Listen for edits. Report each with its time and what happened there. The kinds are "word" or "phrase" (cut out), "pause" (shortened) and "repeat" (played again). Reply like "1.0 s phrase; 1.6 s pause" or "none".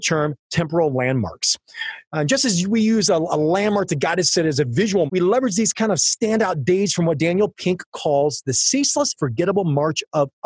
5.1 s word; 9.2 s word

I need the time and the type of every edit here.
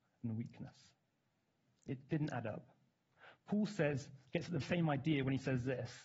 2.1 s word; 4.6 s word

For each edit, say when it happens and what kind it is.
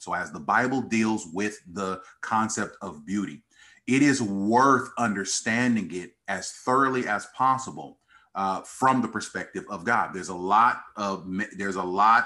none

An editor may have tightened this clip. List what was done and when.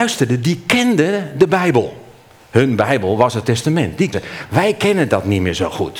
3.4 s word; 4.1 s word

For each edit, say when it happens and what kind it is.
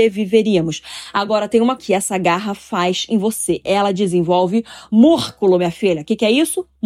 1.8 s word

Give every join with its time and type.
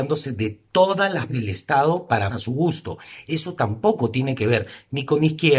1.3 s word; 2.3 s word

